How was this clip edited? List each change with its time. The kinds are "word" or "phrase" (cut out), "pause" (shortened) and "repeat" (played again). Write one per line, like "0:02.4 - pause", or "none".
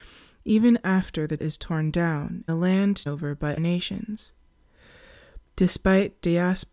0:01.4 - word
0:02.5 - word
0:03.1 - word
0:03.6 - word